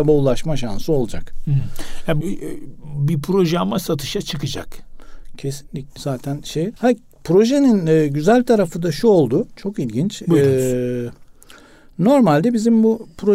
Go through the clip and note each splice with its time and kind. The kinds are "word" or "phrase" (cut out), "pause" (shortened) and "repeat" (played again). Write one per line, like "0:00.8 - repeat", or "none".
0:02.2 - word
0:06.0 - word
0:06.8 - pause